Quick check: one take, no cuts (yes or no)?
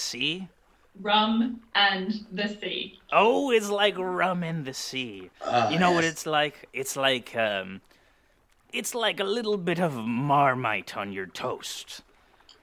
yes